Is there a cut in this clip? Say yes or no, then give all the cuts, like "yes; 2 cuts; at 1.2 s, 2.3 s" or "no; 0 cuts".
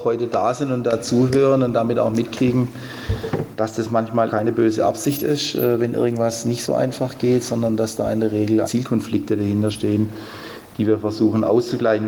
yes; 2 cuts; at 4.3 s, 8.6 s